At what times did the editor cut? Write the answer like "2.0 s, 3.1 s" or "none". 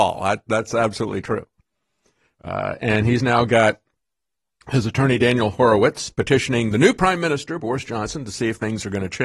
none